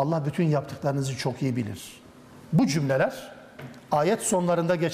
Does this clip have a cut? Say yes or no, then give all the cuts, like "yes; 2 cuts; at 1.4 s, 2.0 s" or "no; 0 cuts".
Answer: no; 0 cuts